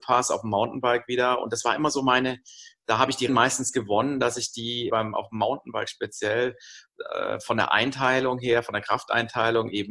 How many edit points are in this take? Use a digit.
2